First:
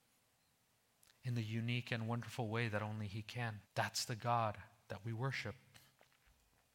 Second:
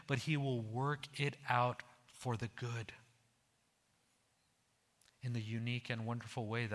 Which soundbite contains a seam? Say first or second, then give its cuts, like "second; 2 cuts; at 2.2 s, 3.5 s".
first; 1 cut; at 3.7 s